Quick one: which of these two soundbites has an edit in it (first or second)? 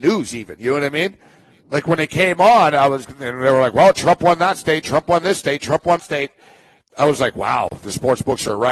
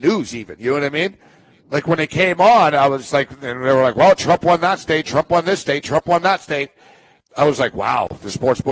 first